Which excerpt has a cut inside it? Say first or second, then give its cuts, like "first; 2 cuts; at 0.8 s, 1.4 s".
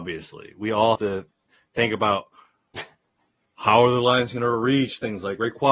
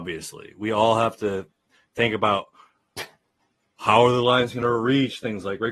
first; 1 cut; at 0.9 s